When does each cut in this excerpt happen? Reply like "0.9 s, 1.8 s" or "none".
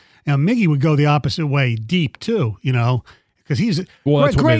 none